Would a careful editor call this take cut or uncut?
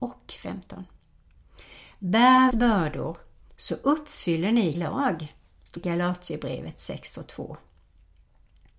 cut